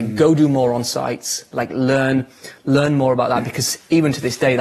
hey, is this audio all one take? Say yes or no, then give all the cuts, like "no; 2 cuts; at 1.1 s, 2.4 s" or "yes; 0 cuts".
yes; 0 cuts